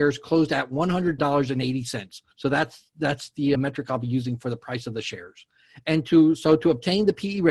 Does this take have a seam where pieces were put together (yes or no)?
yes